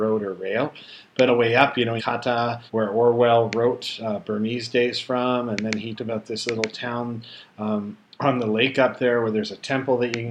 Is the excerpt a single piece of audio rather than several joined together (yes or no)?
no